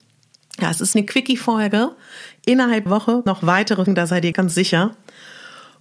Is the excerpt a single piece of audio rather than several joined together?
no; 5 cuts; at 0.9 s, 2.9 s, 3.3 s, 3.9 s, 4.3 s

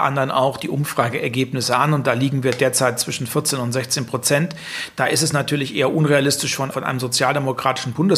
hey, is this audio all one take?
no; 1 cut; at 6.7 s

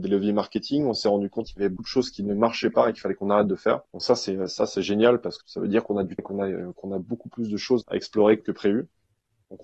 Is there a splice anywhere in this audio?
yes; 7 cuts; at 1.5 s, 1.8 s, 3.9 s, 5.4 s, 6.2 s, 7.8 s, 8.4 s

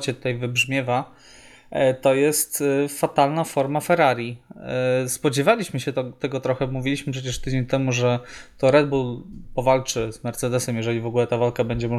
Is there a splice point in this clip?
no; 0 cuts

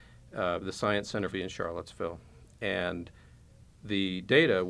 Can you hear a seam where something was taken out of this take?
yes; 1 cut; at 1.3 s

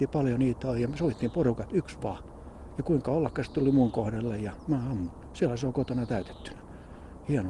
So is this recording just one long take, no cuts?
yes; 0 cuts

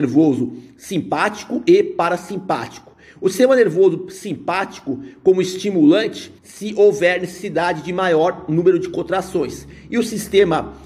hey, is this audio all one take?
no; 1 cut; at 6.4 s

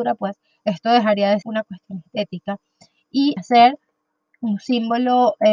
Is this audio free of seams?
no; 2 cuts; at 1.4 s, 3.4 s

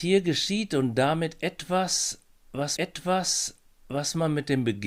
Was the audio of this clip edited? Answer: yes; 1 cut; at 2.8 s

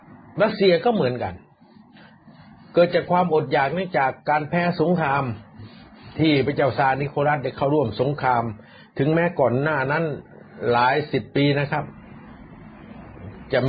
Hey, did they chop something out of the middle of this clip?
no; 0 cuts

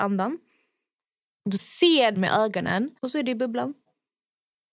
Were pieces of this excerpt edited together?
yes; 3 cuts; at 1.6 s, 2.1 s, 3.0 s

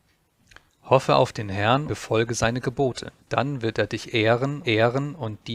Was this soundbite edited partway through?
yes; 3 cuts; at 1.9 s, 3.2 s, 4.6 s

